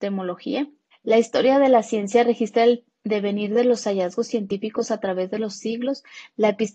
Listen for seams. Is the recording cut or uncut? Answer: cut